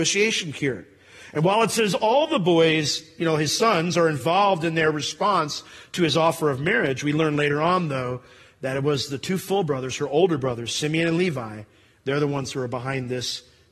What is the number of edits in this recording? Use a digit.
0